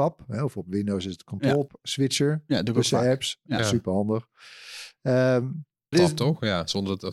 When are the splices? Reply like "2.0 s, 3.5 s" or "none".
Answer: 1.7 s, 5.9 s